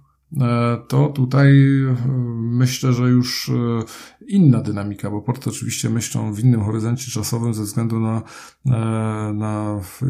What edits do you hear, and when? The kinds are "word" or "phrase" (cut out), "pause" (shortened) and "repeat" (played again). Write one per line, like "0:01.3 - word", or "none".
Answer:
none